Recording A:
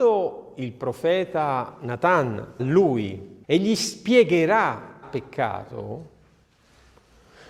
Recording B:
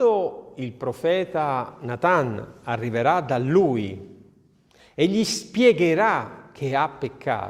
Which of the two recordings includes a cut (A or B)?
A